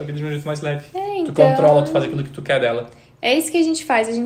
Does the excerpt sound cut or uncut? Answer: uncut